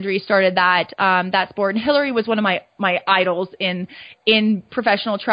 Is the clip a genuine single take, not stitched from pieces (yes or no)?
yes